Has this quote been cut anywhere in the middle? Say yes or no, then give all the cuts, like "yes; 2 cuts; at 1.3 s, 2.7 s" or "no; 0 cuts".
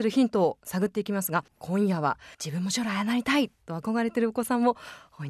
yes; 2 cuts; at 1.5 s, 2.3 s